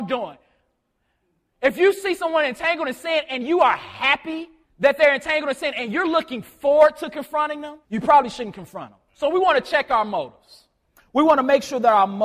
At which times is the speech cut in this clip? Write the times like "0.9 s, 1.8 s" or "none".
4.6 s, 7.8 s, 9.1 s